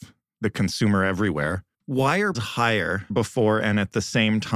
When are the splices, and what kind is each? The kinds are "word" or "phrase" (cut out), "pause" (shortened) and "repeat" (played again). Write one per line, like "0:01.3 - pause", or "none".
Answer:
0:01.7 - pause
0:02.3 - word
0:03.1 - phrase